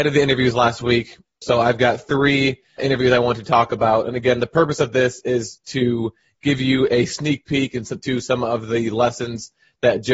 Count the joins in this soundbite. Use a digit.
0